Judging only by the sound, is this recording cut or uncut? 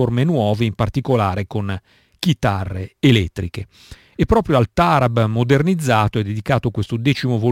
uncut